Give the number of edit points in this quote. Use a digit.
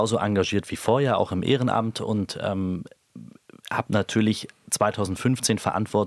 0